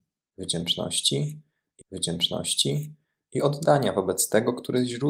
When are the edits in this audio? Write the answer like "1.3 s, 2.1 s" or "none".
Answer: 1.8 s